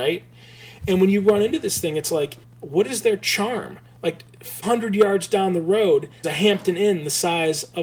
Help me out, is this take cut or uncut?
cut